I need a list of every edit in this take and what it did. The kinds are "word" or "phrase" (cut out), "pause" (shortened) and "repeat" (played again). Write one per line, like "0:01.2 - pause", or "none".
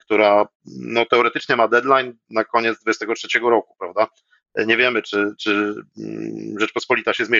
none